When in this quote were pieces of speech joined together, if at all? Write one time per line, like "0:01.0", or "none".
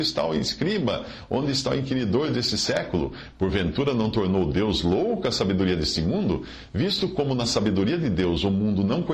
none